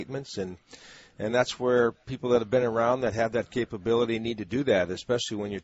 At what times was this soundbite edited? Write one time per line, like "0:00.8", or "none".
none